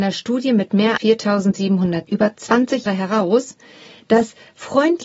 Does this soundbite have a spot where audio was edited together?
yes; 3 cuts; at 1.0 s, 2.1 s, 2.9 s

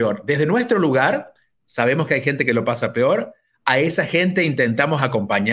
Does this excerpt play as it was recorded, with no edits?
yes; 0 cuts

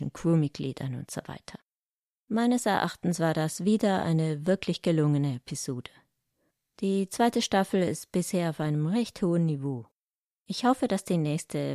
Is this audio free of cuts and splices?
yes; 0 cuts

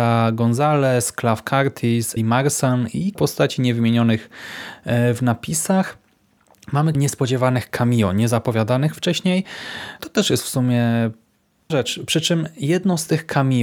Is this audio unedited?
no; 4 cuts; at 2.2 s, 3.1 s, 6.9 s, 11.7 s

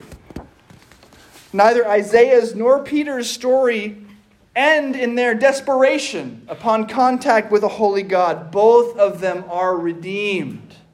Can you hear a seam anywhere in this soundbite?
no; 0 cuts

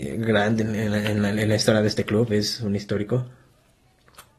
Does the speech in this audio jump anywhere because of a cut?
no; 0 cuts

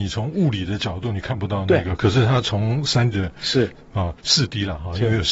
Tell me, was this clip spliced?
yes; 2 cuts; at 3.1 s, 4.2 s

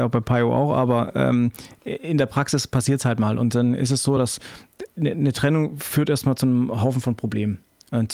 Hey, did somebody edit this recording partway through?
no; 0 cuts

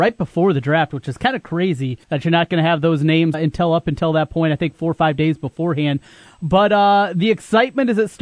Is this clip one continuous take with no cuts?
no; 2 cuts; at 2.0 s, 3.3 s

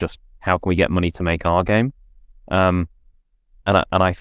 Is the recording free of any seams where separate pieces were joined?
yes; 0 cuts

